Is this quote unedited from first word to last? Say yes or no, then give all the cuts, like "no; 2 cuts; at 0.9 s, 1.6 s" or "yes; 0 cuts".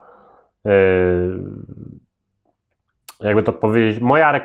yes; 0 cuts